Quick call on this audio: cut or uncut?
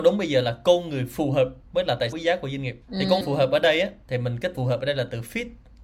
cut